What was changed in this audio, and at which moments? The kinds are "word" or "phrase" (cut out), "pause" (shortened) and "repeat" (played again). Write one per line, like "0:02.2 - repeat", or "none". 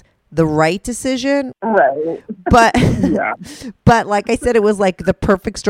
0:01.6 - pause